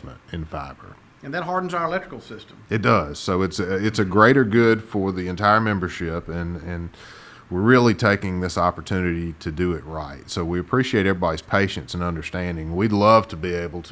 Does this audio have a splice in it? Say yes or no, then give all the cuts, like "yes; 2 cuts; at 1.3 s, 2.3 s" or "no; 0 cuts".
no; 0 cuts